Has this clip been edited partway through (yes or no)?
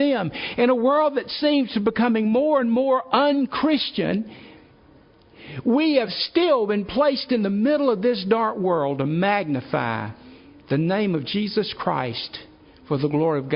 no